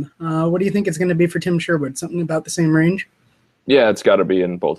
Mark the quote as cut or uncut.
uncut